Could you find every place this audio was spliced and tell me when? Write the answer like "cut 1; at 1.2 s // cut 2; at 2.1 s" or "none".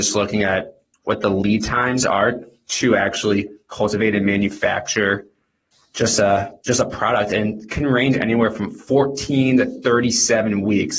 none